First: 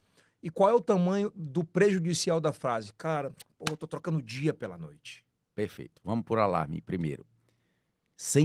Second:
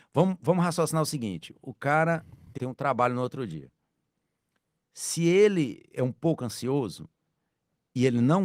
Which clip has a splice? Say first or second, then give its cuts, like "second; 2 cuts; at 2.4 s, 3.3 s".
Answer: second; 1 cut; at 2.6 s